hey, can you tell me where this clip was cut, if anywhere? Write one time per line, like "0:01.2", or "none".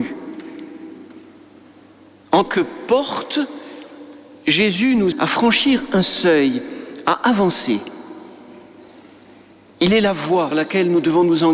0:02.4
0:05.1
0:10.5